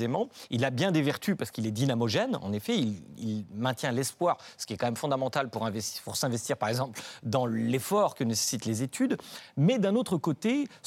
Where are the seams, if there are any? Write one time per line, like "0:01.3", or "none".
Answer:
none